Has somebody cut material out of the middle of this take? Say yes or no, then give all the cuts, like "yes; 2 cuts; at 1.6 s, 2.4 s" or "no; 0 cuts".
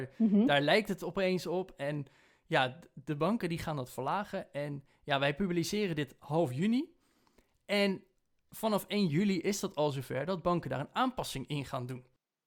no; 0 cuts